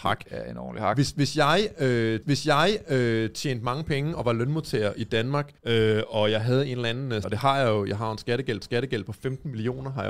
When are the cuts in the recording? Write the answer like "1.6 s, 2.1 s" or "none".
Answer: 2.2 s, 5.6 s, 7.2 s, 8.6 s